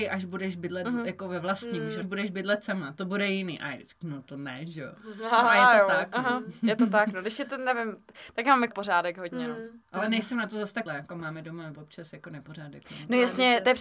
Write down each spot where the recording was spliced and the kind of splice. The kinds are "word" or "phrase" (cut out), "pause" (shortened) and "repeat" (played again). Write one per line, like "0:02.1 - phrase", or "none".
0:02.0 - phrase
0:04.0 - word
0:08.7 - word
0:09.8 - pause
0:10.9 - word